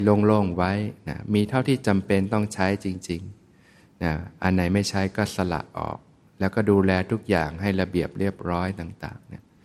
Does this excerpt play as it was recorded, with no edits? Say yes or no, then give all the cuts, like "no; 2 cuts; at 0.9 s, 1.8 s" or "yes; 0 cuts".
yes; 0 cuts